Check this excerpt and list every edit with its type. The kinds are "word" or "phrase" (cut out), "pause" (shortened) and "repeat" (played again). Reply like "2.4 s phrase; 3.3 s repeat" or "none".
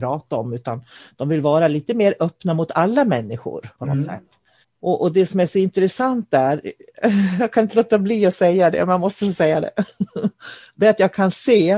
3.7 s pause; 4.6 s pause